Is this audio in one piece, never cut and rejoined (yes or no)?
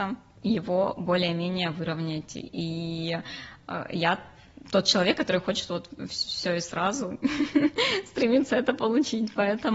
yes